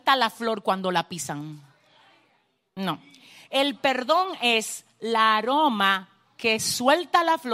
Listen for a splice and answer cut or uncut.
uncut